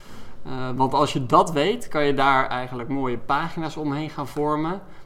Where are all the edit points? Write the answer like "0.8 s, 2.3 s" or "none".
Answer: none